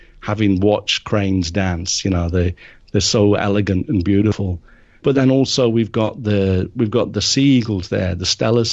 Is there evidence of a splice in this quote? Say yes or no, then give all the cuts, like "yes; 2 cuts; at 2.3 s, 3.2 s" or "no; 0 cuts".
no; 0 cuts